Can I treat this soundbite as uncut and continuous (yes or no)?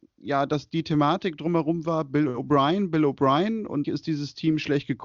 no